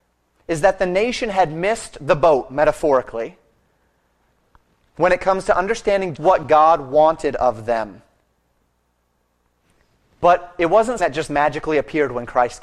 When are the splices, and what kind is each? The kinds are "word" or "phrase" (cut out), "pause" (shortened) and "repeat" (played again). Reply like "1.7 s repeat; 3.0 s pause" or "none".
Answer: 6.2 s word; 11.0 s word